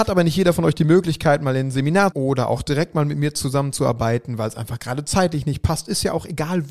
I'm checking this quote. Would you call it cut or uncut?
cut